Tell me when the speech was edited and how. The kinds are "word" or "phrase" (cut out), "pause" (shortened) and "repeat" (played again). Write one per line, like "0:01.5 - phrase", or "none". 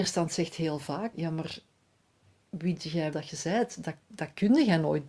0:01.1 - word
0:02.8 - word
0:03.1 - word

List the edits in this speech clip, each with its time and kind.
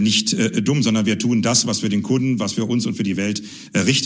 none

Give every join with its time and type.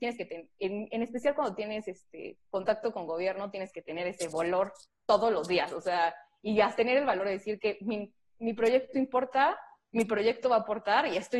0:02.5 - pause
0:08.3 - word

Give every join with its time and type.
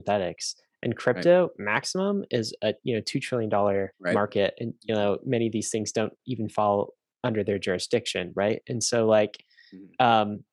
0:03.9 - pause

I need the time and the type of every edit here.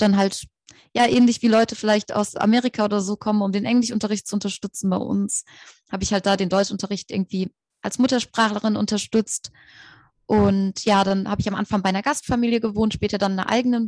none

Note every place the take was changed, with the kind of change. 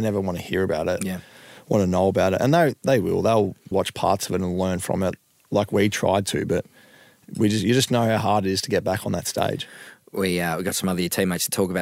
0:03.7 - word

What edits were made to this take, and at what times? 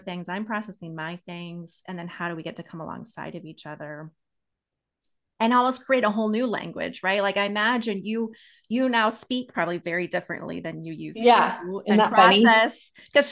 none

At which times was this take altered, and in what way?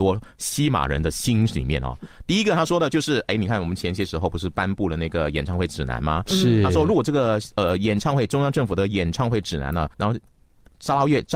0:09.9 - pause

